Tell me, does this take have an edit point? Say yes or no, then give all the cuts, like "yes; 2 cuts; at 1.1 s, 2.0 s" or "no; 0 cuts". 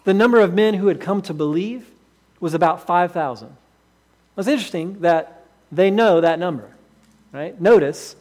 no; 0 cuts